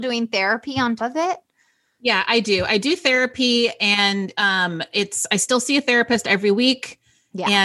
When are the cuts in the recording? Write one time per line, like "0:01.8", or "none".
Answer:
0:01.0